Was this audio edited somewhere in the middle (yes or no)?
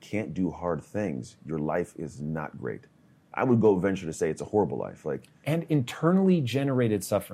no